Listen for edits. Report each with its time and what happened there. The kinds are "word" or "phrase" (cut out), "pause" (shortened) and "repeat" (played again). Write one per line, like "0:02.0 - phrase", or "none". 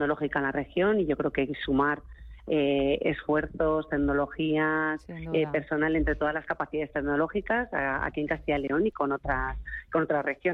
none